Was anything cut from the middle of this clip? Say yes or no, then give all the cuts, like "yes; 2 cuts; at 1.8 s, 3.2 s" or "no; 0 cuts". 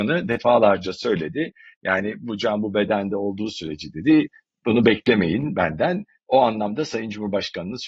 no; 0 cuts